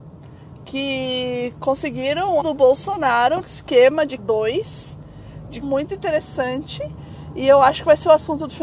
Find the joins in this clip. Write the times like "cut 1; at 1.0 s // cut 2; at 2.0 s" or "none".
cut 1; at 2.4 s // cut 2; at 3.4 s // cut 3; at 4.2 s // cut 4; at 5.6 s